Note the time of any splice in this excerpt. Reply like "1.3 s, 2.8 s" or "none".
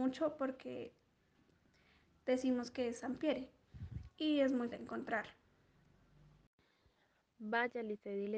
4.7 s

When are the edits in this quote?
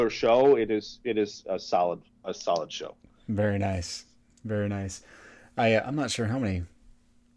none

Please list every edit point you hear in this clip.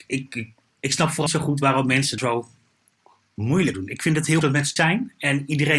1.3 s, 2.2 s, 3.7 s, 4.4 s, 4.8 s

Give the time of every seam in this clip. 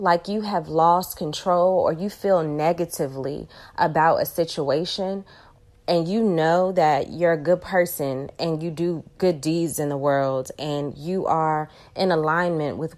none

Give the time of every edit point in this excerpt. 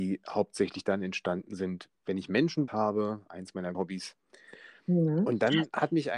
2.7 s, 3.7 s

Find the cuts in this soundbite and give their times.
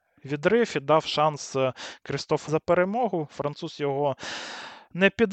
2.5 s

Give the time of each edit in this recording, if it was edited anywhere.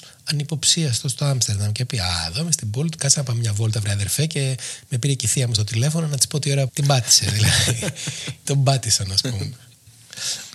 3.0 s, 6.7 s, 8.5 s

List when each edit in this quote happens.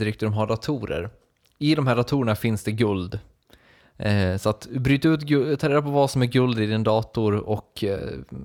none

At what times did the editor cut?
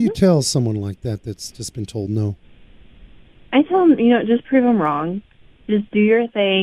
none

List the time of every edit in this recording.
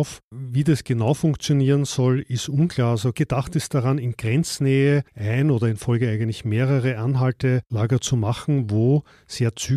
5.1 s

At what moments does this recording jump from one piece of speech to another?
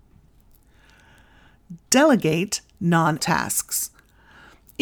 3.2 s

